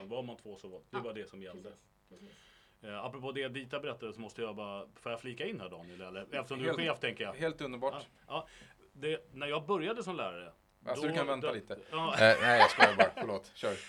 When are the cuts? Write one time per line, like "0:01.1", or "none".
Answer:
none